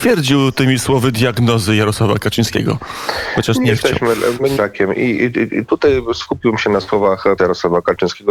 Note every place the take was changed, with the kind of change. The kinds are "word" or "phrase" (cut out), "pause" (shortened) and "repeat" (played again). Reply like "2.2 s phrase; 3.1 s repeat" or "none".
3.6 s phrase; 4.6 s word; 6.6 s word; 7.4 s word